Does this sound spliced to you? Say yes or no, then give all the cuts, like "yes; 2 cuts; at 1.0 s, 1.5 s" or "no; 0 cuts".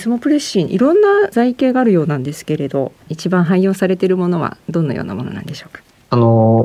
yes; 1 cut; at 3.1 s